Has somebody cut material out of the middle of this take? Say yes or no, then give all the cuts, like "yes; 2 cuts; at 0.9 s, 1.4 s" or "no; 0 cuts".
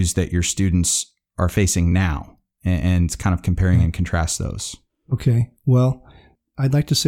no; 0 cuts